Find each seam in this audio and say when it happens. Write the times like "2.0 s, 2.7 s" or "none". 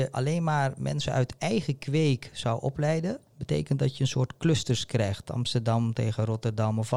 3.3 s